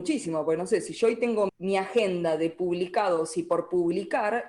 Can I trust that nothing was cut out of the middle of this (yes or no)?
no